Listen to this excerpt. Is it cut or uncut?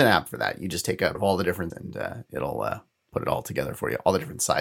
cut